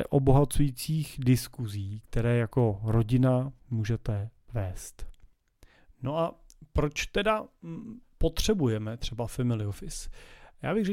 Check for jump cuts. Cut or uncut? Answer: uncut